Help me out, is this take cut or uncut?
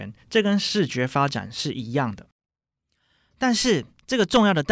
uncut